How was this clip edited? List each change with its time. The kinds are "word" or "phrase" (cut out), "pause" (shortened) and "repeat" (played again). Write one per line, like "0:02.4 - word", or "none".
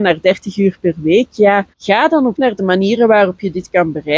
0:01.7 - pause
0:02.3 - word